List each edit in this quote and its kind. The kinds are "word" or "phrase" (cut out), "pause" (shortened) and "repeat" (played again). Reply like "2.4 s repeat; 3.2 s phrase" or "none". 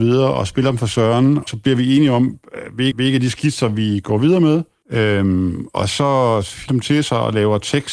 1.5 s word; 2.9 s repeat; 6.7 s phrase

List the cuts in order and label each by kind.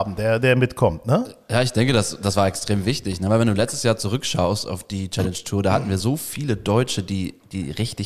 none

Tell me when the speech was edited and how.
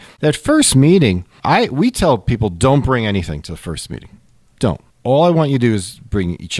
none

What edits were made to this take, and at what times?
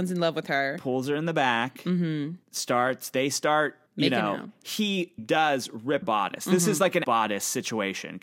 2.4 s pause; 3.9 s pause; 5.2 s word; 6.0 s word; 7.0 s phrase

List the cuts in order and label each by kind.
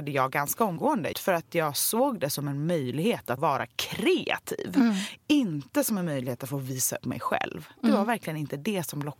1.1 s word; 3.4 s word; 7.0 s word

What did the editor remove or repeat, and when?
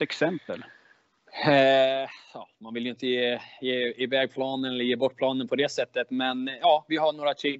none

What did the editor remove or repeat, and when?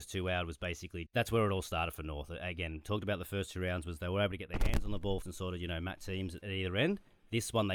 1.1 s word; 5.2 s word; 6.0 s phrase; 6.4 s word

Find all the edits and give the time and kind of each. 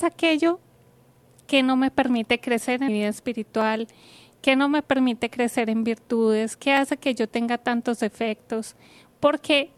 2.9 s word

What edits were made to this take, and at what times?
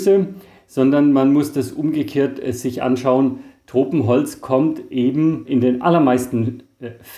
none

